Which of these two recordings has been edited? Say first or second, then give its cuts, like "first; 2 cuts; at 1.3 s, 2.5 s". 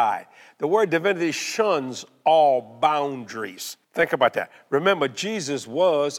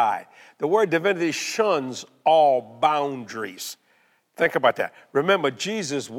first; 1 cut; at 3.8 s